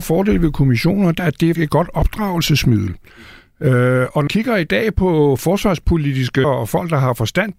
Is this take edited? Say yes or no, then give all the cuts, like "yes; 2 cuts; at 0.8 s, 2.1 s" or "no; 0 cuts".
yes; 4 cuts; at 1.2 s, 1.6 s, 4.3 s, 6.4 s